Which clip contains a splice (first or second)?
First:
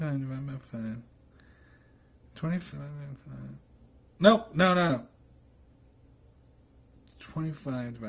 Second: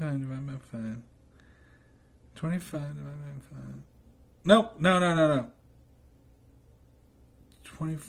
first